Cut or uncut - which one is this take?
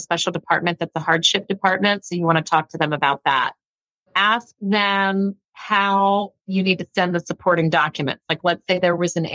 uncut